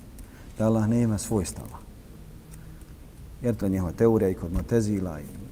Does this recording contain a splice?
yes; 1 cut; at 3.6 s

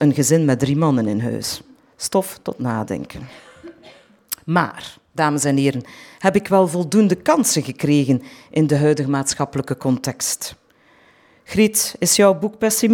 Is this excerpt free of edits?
yes; 0 cuts

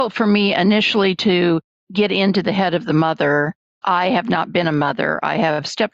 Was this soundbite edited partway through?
yes; 1 cut; at 3.8 s

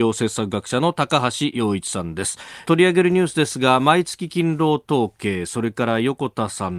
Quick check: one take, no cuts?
no; 1 cut; at 2.6 s

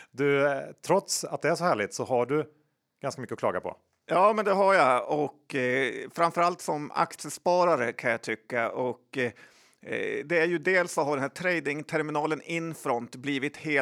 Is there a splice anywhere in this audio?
no; 0 cuts

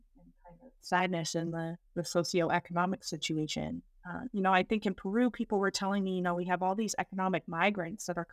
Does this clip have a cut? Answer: no; 0 cuts

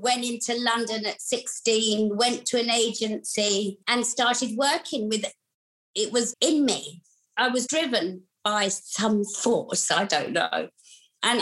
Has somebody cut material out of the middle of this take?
yes; 3 cuts; at 3.8 s, 6.3 s, 7.7 s

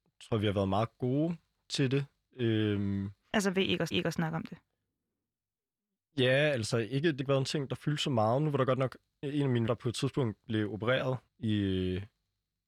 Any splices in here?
yes; 5 cuts; at 3.9 s, 7.2 s, 9.2 s, 9.7 s, 11.3 s

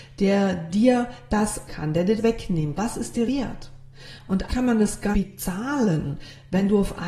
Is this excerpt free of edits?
no; 6 cuts; at 1.7 s, 2.2 s, 2.8 s, 3.3 s, 4.5 s, 5.1 s

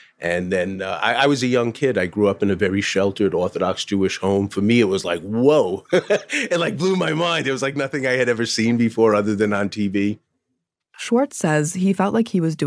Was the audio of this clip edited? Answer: no; 0 cuts

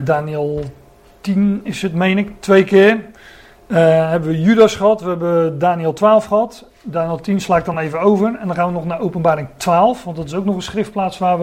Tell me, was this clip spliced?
no; 0 cuts

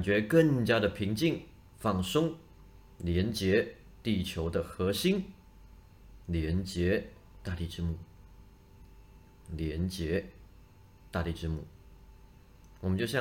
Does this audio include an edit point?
no; 0 cuts

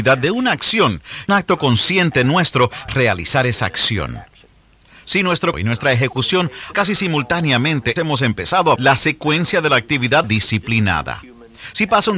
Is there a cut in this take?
yes; 7 cuts; at 1.3 s, 2.9 s, 5.5 s, 6.7 s, 8.0 s, 8.8 s, 10.2 s

